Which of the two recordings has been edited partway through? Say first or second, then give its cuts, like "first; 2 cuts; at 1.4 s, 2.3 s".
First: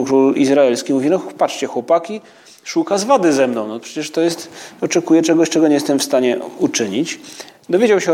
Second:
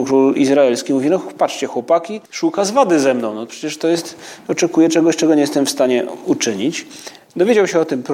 second; 1 cut; at 2.3 s